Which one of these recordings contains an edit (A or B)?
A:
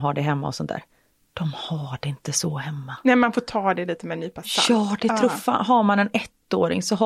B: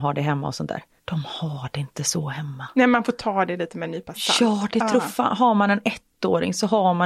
B